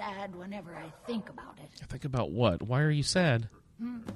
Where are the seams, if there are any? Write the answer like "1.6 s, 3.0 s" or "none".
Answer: none